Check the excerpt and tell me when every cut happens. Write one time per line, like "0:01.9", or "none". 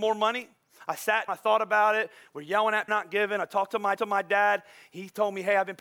0:01.3
0:02.9
0:04.0